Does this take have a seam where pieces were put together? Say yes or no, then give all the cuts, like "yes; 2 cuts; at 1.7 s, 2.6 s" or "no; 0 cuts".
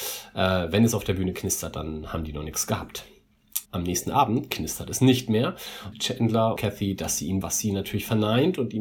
yes; 4 cuts; at 3.7 s, 5.9 s, 6.6 s, 7.4 s